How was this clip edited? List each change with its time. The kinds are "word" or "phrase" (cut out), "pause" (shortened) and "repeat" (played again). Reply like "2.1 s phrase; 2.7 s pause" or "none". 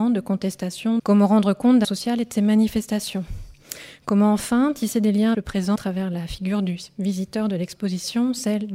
1.0 s phrase; 1.8 s word; 5.3 s word; 5.8 s phrase